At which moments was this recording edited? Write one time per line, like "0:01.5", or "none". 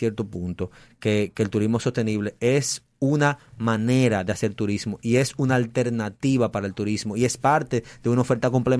none

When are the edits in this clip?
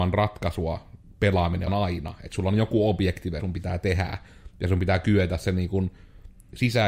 0:01.7
0:03.4

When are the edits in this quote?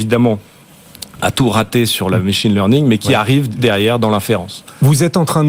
0:03.6

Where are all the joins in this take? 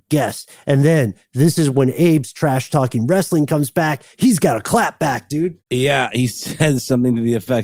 0:05.6

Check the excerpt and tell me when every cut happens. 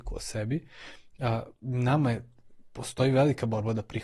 0:01.6

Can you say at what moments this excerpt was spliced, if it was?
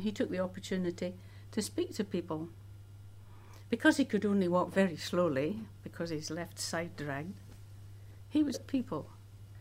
0:08.5

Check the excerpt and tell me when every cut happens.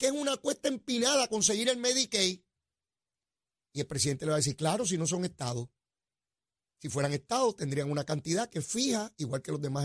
none

